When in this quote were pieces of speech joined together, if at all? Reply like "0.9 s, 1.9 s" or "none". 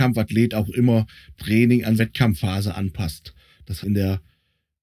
1.4 s, 2.0 s, 3.8 s